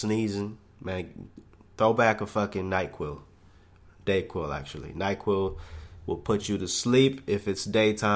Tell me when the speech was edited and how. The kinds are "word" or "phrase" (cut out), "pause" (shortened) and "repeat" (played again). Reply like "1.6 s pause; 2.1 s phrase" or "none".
none